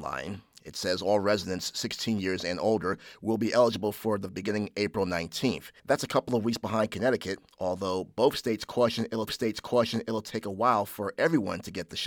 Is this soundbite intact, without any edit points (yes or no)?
no